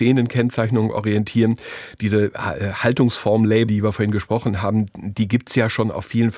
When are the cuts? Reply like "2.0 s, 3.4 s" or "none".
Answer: 3.7 s